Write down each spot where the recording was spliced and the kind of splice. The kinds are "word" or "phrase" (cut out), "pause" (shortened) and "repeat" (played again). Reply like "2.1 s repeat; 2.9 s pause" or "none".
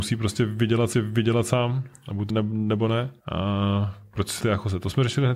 0.9 s repeat; 2.3 s word; 3.2 s pause; 4.4 s word